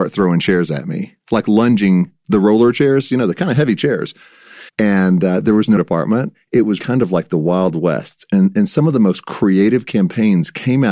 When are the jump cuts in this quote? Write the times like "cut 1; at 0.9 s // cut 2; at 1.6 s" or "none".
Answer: cut 1; at 1.2 s // cut 2; at 4.7 s // cut 3; at 5.8 s // cut 4; at 6.8 s